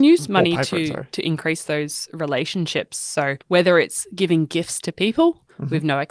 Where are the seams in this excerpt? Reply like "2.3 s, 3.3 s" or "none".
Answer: 3.4 s